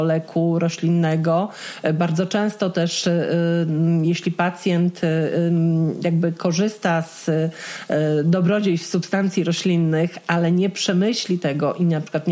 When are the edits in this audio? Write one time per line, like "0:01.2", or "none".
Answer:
none

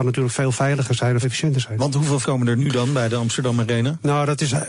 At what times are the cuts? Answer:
0:01.2
0:02.2

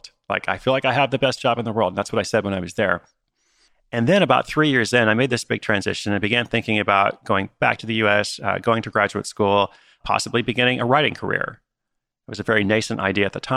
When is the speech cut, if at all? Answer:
none

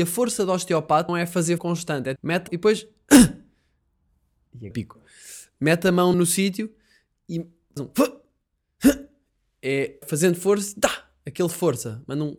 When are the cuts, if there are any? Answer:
0:01.1
0:01.6
0:02.2
0:02.5
0:04.7
0:06.1
0:07.8
0:10.0
0:11.5

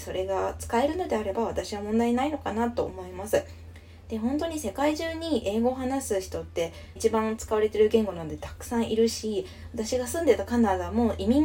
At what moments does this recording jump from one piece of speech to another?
0:07.0

